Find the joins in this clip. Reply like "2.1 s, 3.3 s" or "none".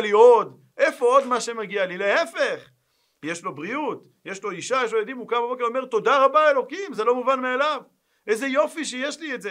none